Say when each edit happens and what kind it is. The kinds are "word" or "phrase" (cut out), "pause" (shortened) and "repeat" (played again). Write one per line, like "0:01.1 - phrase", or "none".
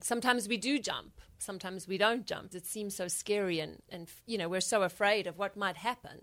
0:02.5 - word
0:03.9 - word